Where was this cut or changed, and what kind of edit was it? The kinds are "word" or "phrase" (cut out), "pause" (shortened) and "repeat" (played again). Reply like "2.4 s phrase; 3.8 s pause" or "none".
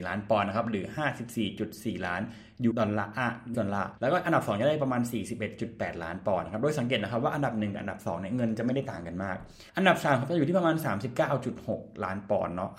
2.7 s word; 3.5 s word; 4.0 s pause; 9.7 s pause